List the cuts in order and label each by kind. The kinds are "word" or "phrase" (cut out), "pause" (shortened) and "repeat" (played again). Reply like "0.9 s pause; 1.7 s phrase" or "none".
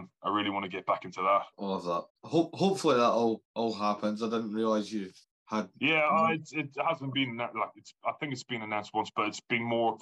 1.5 s pause; 2.1 s pause; 3.4 s pause; 5.2 s pause